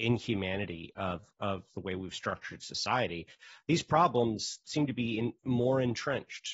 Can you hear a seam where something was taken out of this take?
no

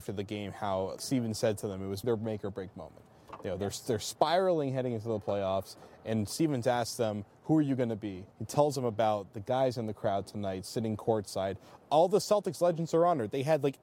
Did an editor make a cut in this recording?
yes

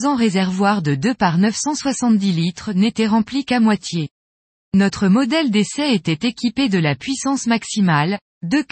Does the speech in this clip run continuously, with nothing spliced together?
yes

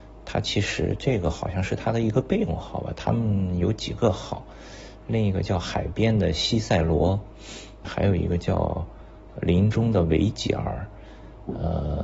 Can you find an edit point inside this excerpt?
yes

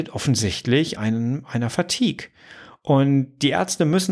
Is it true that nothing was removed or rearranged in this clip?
no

